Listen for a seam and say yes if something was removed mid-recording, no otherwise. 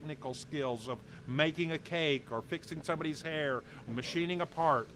yes